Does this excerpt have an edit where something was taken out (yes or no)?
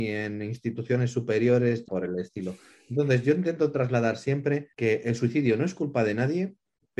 yes